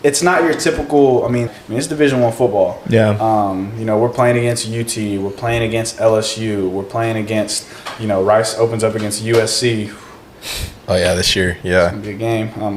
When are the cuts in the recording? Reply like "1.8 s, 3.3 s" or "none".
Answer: 1.5 s, 10.8 s